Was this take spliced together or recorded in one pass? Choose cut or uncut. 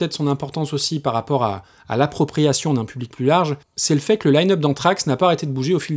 uncut